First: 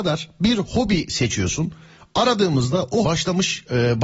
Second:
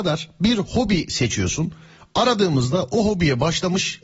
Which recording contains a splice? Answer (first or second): first